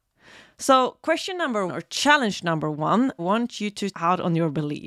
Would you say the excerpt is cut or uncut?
cut